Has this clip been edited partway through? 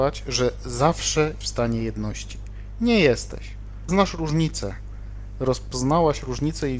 yes; 2 cuts; at 1.4 s, 3.9 s

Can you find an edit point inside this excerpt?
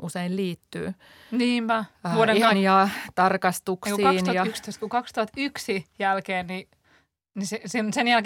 yes; 1 cut; at 2.5 s

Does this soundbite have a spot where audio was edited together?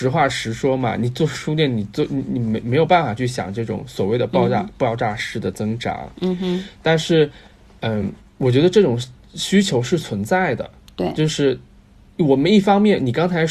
no; 0 cuts

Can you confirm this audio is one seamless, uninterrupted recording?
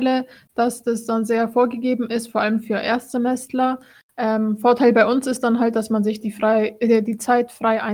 yes; 0 cuts

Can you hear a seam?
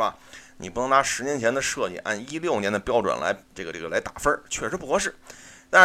yes; 1 cut; at 3.4 s

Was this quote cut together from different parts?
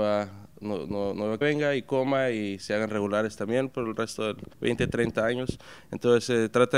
yes; 2 cuts; at 1.4 s, 4.5 s

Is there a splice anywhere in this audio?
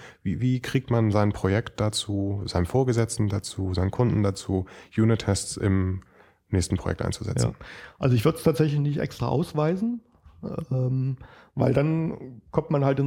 no; 0 cuts

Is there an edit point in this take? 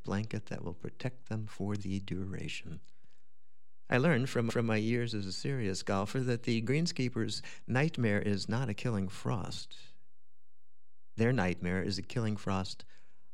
yes; 1 cut; at 4.5 s

